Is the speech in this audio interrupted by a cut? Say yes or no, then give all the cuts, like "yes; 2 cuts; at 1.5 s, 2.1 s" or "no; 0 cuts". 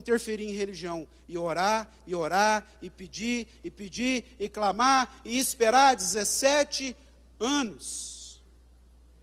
no; 0 cuts